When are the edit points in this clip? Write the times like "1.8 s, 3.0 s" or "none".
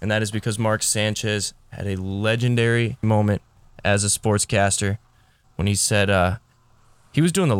3.0 s